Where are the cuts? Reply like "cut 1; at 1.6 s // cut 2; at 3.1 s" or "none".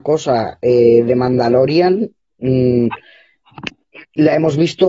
none